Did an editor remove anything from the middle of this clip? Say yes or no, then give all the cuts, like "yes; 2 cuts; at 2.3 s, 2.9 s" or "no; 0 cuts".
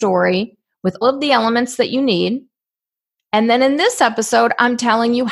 yes; 1 cut; at 1.0 s